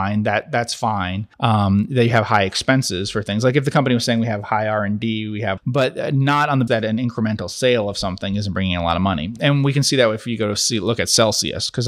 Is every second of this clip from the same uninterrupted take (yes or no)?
no